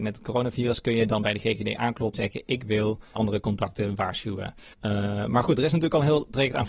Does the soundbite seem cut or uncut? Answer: cut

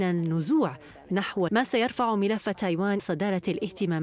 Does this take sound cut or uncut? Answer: cut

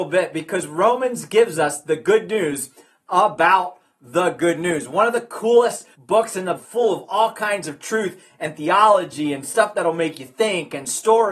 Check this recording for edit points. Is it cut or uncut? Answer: cut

